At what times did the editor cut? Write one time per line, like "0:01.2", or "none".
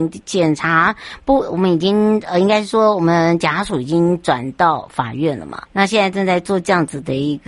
0:05.7